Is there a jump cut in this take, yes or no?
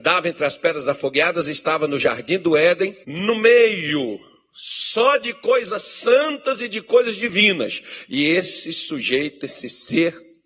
yes